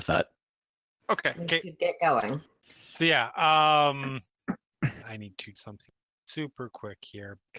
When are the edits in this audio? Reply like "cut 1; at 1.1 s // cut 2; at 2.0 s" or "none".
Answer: cut 1; at 2.6 s // cut 2; at 5.0 s // cut 3; at 5.6 s